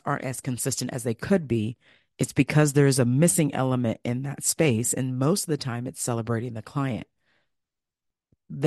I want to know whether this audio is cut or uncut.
uncut